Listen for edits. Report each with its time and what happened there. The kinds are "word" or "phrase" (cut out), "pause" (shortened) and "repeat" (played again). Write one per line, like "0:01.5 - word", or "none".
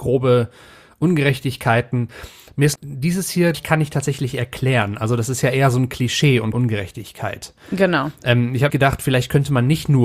0:02.8 - word
0:03.5 - word
0:06.5 - word
0:08.7 - word